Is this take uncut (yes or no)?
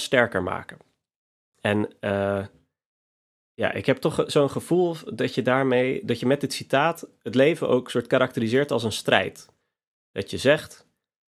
yes